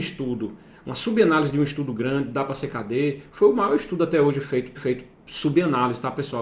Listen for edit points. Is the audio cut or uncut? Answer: cut